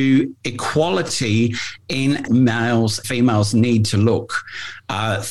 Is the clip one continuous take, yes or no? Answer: no